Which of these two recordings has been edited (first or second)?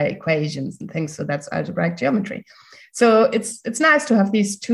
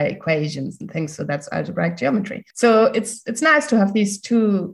second